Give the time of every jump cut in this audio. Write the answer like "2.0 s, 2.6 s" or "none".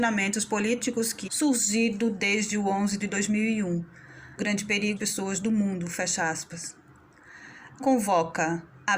1.3 s, 3.0 s, 4.4 s, 5.0 s, 7.8 s